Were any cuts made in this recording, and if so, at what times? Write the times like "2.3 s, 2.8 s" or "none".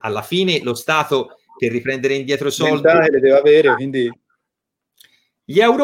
none